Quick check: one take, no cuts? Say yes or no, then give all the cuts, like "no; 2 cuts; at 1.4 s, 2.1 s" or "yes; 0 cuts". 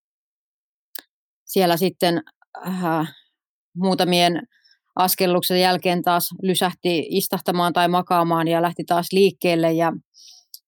yes; 0 cuts